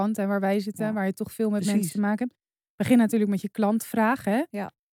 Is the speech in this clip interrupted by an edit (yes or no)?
no